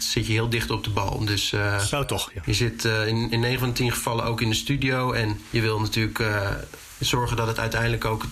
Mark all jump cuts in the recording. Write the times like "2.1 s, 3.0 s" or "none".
none